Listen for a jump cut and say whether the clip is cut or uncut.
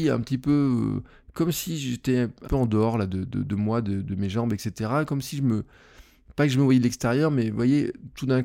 cut